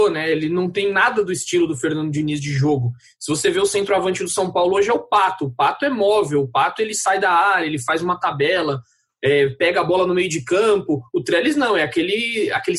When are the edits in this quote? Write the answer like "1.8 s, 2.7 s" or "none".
none

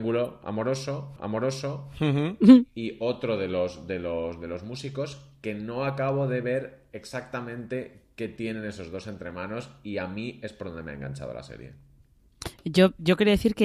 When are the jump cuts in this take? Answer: 1.2 s

